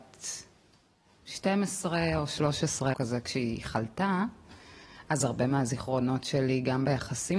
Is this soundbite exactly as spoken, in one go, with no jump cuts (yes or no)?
no